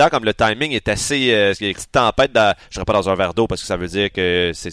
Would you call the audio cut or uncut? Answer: cut